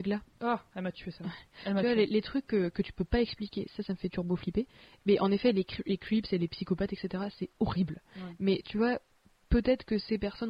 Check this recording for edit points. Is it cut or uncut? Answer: uncut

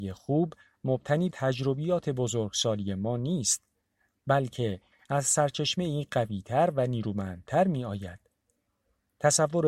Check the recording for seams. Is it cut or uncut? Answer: cut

